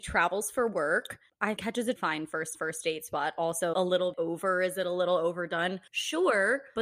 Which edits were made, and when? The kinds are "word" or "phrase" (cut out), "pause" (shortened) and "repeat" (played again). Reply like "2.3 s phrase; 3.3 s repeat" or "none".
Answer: 1.6 s word; 2.0 s word; 2.5 s repeat; 3.7 s phrase; 4.1 s word; 5.9 s pause